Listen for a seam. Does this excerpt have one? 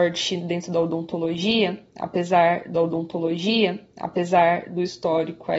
yes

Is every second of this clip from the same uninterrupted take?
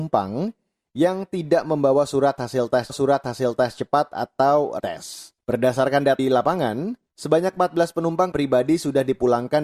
no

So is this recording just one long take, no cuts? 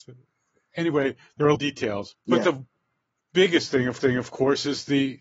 no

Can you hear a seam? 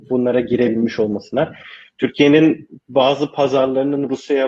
no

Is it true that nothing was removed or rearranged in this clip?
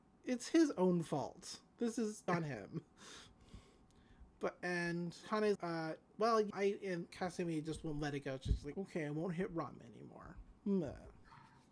no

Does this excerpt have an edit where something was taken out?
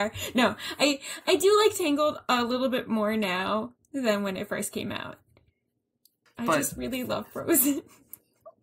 no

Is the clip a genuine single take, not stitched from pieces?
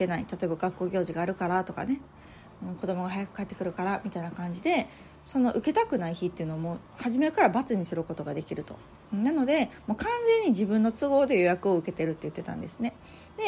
no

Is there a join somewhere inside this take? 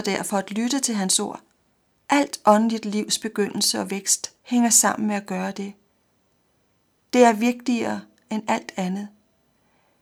yes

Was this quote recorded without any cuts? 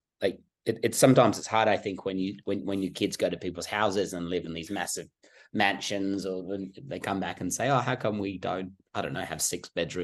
yes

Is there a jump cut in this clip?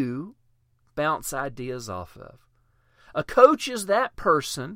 no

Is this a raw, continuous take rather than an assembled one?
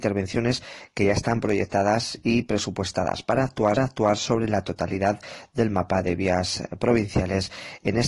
no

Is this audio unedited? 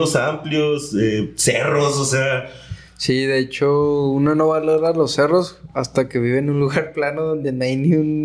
yes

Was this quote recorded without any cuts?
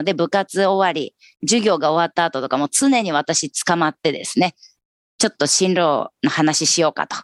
yes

